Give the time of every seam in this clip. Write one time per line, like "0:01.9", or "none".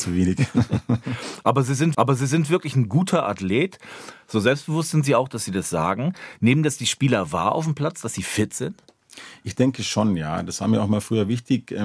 0:01.9